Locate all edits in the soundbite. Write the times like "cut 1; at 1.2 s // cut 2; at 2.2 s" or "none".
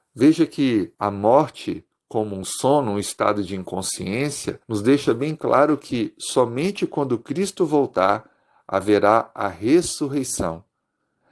cut 1; at 0.9 s // cut 2; at 4.6 s